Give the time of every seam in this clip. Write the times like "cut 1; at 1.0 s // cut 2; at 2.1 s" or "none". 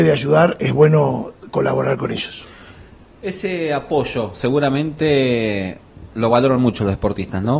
none